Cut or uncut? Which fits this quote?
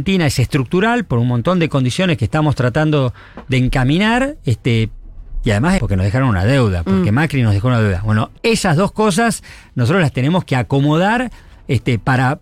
cut